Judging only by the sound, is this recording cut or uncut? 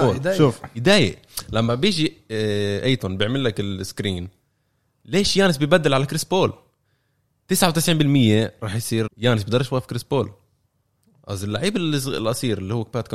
cut